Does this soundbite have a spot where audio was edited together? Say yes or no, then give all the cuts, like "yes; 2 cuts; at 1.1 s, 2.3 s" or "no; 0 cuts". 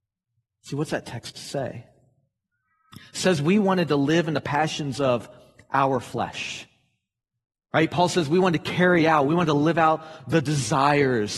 no; 0 cuts